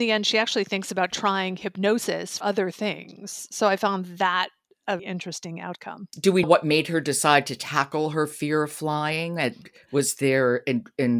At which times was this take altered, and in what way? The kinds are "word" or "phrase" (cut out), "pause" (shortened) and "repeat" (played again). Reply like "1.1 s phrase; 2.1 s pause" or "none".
2.4 s word; 5.0 s word; 6.4 s word

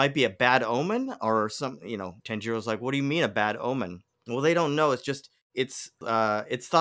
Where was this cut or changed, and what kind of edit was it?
2.2 s pause

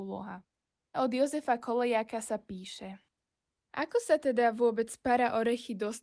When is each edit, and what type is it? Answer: 0.9 s word

